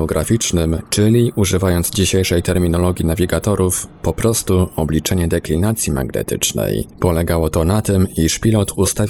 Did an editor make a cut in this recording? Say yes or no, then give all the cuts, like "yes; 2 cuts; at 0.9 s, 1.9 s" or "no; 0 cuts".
no; 0 cuts